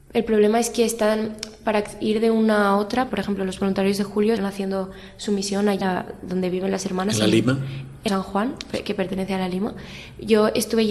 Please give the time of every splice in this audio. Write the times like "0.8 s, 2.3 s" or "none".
3.1 s, 4.4 s, 5.8 s, 8.1 s